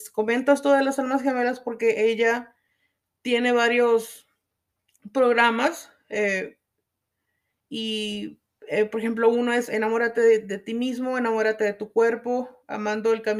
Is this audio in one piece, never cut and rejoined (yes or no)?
yes